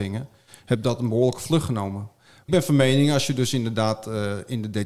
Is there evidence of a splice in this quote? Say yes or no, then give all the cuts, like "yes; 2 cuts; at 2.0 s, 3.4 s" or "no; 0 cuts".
yes; 1 cut; at 2.5 s